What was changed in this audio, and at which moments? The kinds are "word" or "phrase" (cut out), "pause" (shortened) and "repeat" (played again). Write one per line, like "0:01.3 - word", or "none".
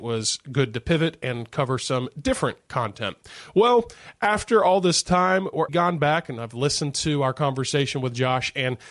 0:05.7 - word